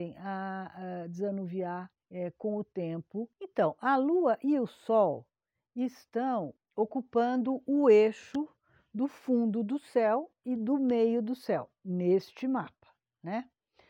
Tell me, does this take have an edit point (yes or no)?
yes